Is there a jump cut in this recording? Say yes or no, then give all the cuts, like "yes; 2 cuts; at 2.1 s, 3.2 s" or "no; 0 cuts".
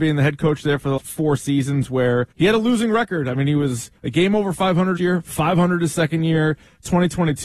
yes; 4 cuts; at 1.0 s, 2.3 s, 4.0 s, 5.0 s